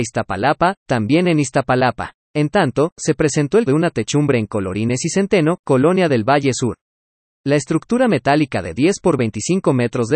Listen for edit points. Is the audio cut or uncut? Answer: cut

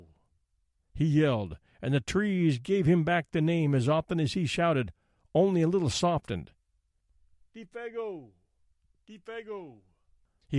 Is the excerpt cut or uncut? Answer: uncut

